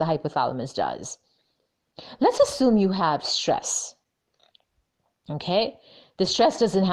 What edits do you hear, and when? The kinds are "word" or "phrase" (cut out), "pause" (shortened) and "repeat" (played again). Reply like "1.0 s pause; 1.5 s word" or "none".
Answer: none

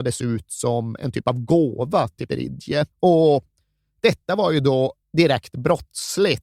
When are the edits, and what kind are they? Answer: 2.3 s word; 2.9 s pause; 5.0 s pause

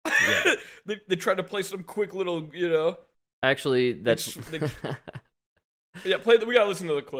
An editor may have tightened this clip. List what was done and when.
none

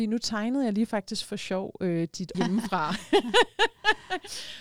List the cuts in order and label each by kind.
2.3 s word

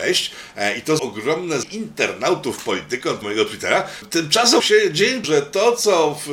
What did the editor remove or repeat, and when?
1.0 s word; 1.6 s word; 3.2 s word; 4.6 s word; 5.2 s word

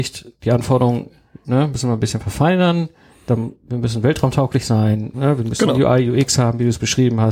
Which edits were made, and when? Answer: 5.1 s word

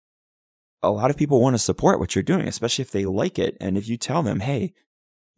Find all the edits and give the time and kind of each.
none

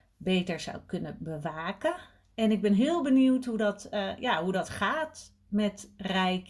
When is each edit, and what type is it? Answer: none

